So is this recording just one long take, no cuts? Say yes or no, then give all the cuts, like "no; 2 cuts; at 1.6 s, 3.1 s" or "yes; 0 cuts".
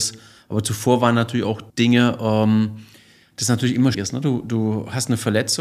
no; 2 cuts; at 1.7 s, 3.9 s